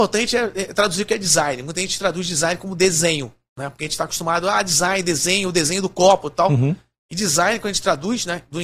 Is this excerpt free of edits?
yes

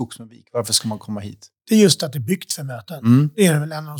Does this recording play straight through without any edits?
yes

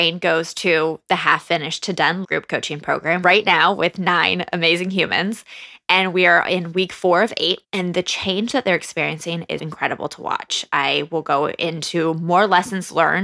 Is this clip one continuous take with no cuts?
no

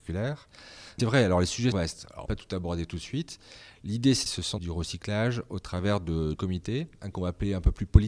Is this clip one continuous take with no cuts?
no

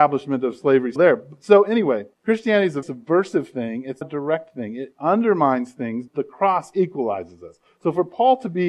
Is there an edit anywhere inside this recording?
yes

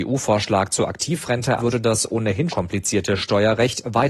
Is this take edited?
yes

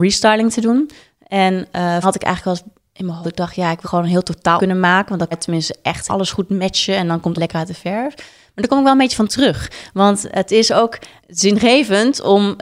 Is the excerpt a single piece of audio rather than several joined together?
no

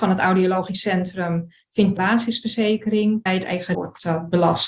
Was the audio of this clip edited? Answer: yes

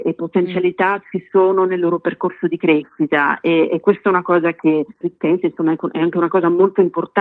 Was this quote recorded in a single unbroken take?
no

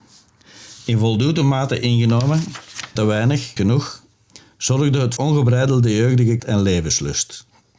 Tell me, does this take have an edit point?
yes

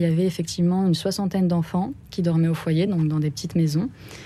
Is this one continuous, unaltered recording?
yes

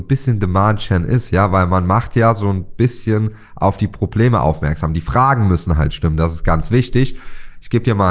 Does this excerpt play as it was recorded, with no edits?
yes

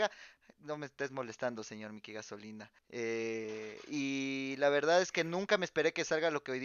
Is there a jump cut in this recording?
yes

